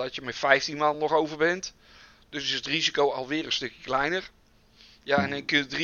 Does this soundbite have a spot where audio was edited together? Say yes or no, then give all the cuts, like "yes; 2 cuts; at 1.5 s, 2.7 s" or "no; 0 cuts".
no; 0 cuts